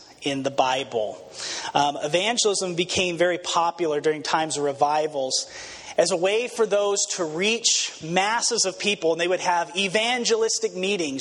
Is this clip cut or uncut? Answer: uncut